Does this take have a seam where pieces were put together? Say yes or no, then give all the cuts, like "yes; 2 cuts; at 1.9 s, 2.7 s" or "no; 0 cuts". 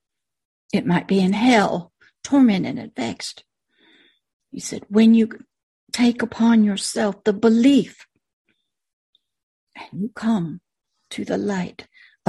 no; 0 cuts